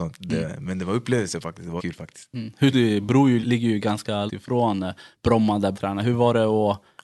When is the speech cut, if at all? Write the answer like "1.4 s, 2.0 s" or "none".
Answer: 1.8 s, 2.7 s, 3.4 s, 4.3 s, 5.7 s